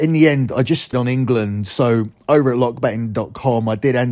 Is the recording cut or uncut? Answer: cut